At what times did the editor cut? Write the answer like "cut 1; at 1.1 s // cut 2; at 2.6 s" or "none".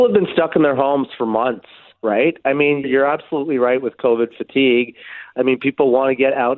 cut 1; at 2.8 s